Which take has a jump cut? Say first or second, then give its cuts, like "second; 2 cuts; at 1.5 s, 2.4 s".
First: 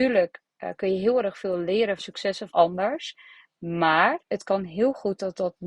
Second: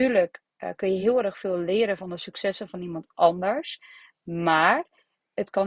first; 3 cuts; at 2.0 s, 2.5 s, 4.2 s